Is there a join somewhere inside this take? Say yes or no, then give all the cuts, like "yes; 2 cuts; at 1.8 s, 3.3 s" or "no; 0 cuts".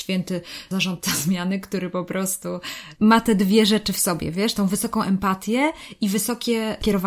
no; 0 cuts